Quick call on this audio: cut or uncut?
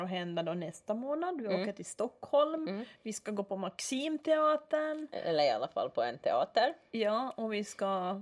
uncut